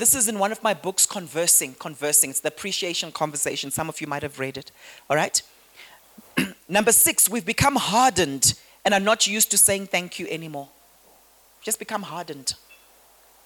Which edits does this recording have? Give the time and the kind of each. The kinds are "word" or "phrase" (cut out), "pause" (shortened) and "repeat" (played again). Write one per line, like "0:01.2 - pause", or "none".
none